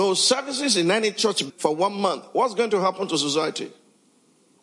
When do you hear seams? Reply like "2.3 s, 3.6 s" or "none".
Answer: 1.5 s